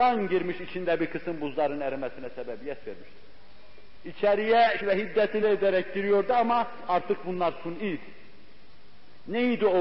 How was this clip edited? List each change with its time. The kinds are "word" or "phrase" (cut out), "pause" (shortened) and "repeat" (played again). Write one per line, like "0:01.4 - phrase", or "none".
0:04.8 - word
0:05.4 - word